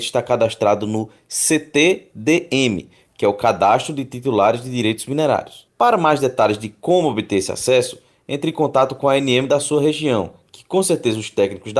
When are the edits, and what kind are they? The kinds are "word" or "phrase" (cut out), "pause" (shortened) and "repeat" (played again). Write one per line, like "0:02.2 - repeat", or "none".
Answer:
none